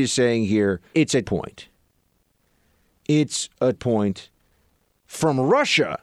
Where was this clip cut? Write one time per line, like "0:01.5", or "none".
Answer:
0:00.9
0:01.2
0:03.7